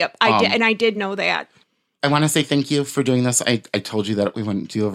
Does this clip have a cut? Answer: no; 0 cuts

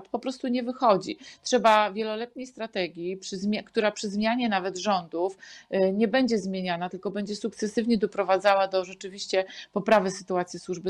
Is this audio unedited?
yes; 0 cuts

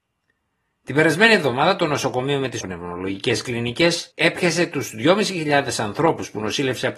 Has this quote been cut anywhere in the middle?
yes; 2 cuts; at 2.6 s, 4.1 s

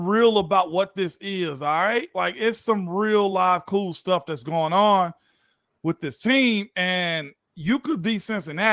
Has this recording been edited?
no; 0 cuts

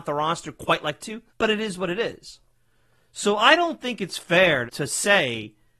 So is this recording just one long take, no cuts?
no; 3 cuts; at 1.0 s, 1.3 s, 4.7 s

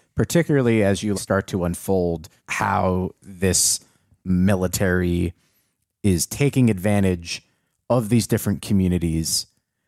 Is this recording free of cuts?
no; 3 cuts; at 1.1 s, 2.4 s, 4.2 s

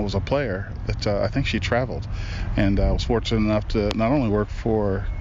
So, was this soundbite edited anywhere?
no; 0 cuts

